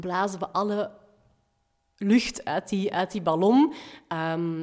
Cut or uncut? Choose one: uncut